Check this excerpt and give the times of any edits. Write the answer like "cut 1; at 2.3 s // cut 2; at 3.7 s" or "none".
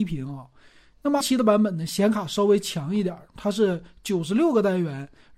cut 1; at 1.2 s